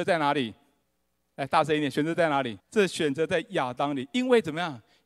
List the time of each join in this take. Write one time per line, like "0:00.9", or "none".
0:02.6